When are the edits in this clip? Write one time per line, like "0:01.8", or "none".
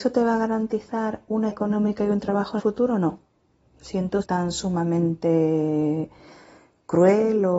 0:01.5
0:02.6
0:04.2